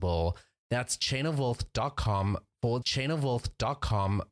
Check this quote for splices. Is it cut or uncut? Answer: cut